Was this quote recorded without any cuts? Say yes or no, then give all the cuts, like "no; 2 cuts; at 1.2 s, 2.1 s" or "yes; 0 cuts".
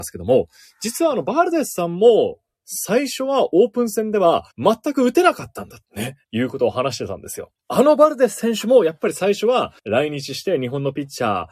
no; 5 cuts; at 4.5 s, 5.8 s, 6.2 s, 7.6 s, 9.8 s